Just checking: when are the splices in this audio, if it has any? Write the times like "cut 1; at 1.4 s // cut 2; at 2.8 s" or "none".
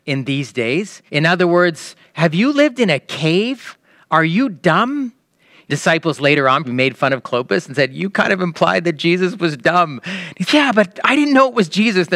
cut 1; at 1.1 s // cut 2; at 5.7 s // cut 3; at 6.6 s // cut 4; at 10.5 s